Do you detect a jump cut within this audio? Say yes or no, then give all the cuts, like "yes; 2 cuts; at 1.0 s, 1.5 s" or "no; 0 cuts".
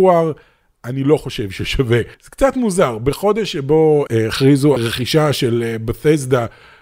yes; 3 cuts; at 2.1 s, 4.1 s, 4.8 s